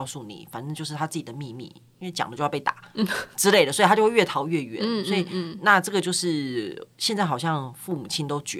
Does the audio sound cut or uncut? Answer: uncut